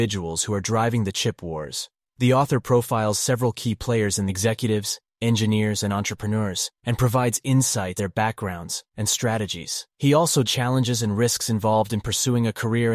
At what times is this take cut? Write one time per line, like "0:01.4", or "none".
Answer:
0:02.1
0:04.3
0:06.8
0:08.0
0:08.9
0:09.9
0:10.4